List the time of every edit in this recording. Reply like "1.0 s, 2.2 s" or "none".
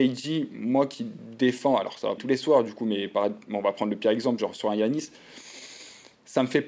2.2 s